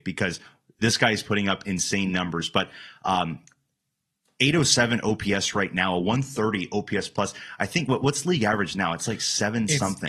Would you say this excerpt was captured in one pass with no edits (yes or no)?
yes